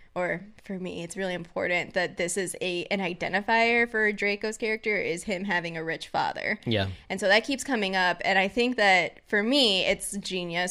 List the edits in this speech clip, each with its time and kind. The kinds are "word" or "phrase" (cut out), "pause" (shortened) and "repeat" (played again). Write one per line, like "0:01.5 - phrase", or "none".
none

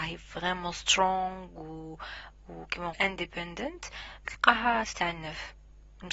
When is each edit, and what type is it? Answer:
0:02.9 - word
0:04.3 - word

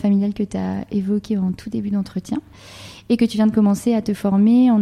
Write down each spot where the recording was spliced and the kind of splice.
none

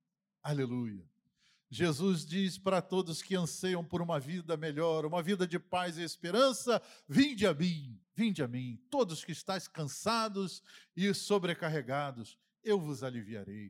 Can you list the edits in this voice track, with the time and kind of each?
0:08.0 - pause

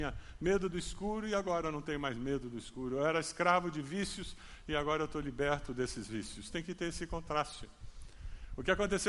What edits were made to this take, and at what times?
none

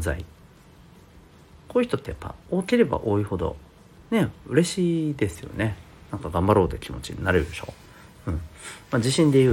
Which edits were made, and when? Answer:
0:02.4 - pause
0:04.0 - pause

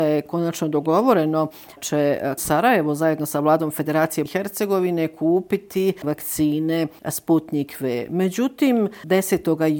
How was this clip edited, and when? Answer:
0:01.8 - word
0:02.4 - word
0:04.3 - word
0:06.0 - word

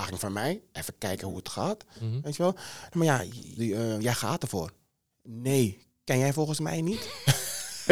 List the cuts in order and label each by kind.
0:03.6 - phrase

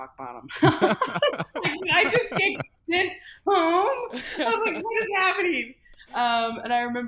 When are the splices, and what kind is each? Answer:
none

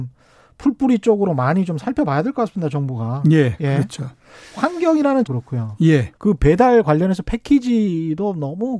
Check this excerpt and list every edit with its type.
0:05.3 - word
0:06.2 - pause

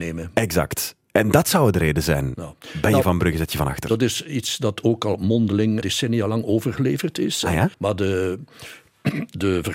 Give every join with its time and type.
0:02.6 - pause
0:05.8 - word
0:07.7 - pause

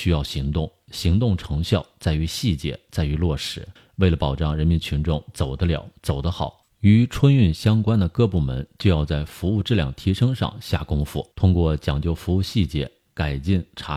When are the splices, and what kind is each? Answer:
0:03.8 - pause
0:06.7 - pause
0:11.3 - pause

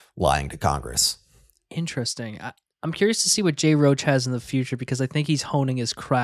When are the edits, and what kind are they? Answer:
none

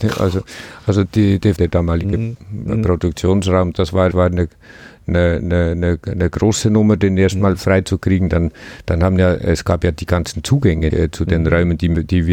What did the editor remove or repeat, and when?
0:01.0 - word
0:01.6 - word
0:03.7 - word
0:04.1 - word
0:10.9 - word

